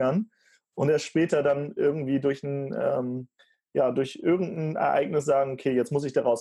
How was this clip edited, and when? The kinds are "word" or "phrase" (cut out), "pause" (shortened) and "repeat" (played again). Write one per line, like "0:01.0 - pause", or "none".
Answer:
none